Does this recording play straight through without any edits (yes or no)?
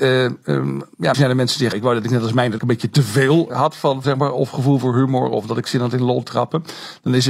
no